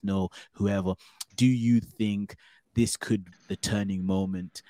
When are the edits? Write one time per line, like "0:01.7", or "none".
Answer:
0:03.3